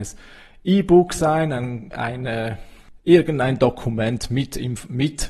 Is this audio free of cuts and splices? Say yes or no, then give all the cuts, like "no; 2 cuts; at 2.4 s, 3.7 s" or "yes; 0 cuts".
no; 1 cut; at 1.9 s